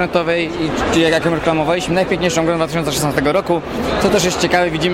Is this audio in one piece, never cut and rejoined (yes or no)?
yes